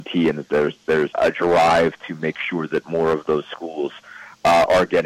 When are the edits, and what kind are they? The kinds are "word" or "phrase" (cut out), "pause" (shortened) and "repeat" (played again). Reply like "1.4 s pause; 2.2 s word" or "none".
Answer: 1.1 s word